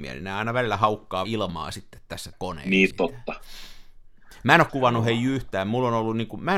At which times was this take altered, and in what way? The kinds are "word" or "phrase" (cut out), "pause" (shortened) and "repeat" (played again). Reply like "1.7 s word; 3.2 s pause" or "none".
1.2 s word; 2.3 s word; 2.9 s word; 4.7 s word